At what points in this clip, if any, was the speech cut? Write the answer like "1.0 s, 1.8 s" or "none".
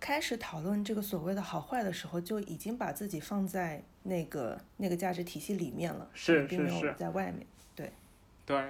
4.7 s